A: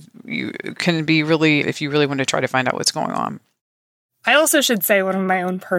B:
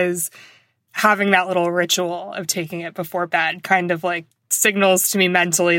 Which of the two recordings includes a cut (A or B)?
A